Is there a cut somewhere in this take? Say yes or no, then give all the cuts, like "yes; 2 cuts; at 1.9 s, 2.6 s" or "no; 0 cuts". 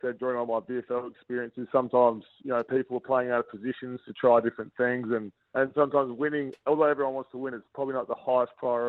no; 0 cuts